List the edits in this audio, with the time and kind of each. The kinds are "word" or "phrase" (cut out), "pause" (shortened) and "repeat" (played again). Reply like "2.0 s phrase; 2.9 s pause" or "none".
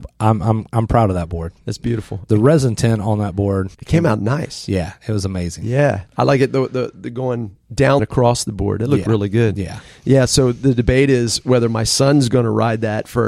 3.7 s pause; 8.0 s phrase

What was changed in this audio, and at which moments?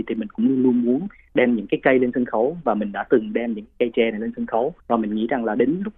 4.8 s pause

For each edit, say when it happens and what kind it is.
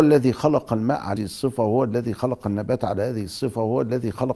1.2 s word

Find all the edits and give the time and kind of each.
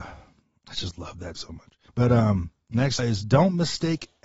1.3 s word; 1.9 s pause; 3.0 s word

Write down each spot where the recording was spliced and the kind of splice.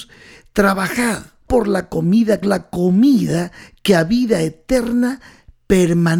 1.5 s word; 2.4 s phrase

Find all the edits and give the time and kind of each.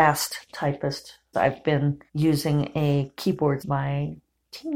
1.3 s word; 2.1 s pause; 3.6 s word

